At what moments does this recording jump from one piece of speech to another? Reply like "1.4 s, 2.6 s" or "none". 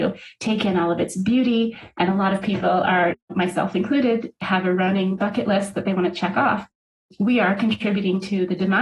none